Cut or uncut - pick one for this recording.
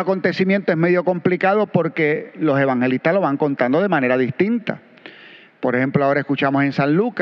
uncut